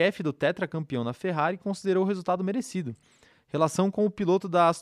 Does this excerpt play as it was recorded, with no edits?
yes; 0 cuts

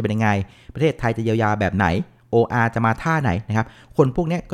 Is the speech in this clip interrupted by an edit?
no; 0 cuts

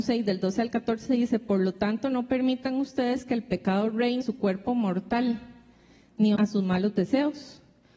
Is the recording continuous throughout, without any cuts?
no; 2 cuts; at 4.2 s, 6.4 s

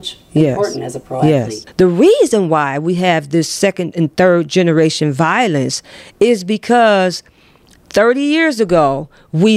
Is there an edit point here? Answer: no; 0 cuts

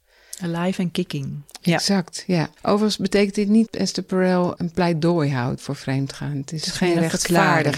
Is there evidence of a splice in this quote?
yes; 3 cuts; at 2.6 s, 3.7 s, 5.6 s

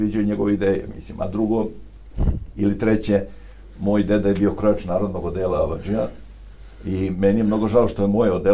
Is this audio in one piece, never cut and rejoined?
yes; 0 cuts

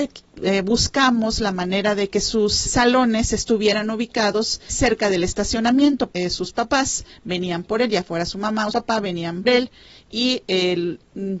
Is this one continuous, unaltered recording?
no; 5 cuts; at 2.7 s, 4.7 s, 6.1 s, 8.7 s, 9.4 s

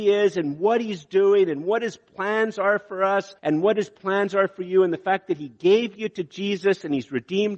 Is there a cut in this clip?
yes; 1 cut; at 3.4 s

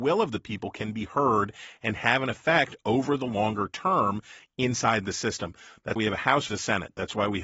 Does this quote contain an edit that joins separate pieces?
yes; 2 cuts; at 6.0 s, 6.5 s

